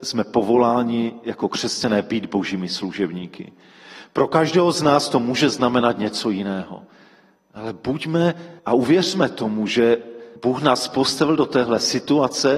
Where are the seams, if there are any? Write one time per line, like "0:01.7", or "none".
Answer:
0:08.6
0:10.4

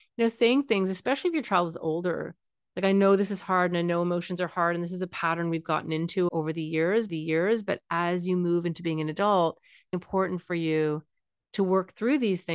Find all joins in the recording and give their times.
0:06.3
0:07.1
0:09.9

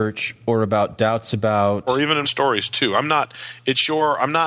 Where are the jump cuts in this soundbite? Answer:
0:02.2

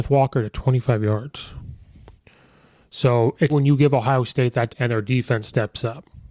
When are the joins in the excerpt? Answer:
0:03.5
0:04.7

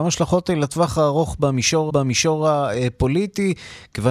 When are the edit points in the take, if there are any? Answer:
0:01.9

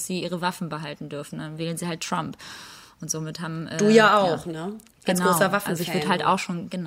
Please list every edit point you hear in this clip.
none

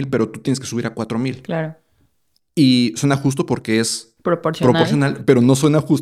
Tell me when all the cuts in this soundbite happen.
none

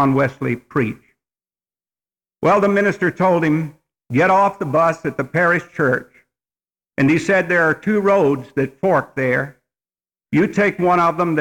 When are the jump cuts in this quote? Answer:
none

